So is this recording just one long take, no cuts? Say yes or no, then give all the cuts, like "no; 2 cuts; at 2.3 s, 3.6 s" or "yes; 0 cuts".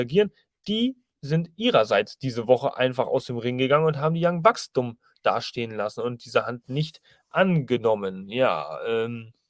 yes; 0 cuts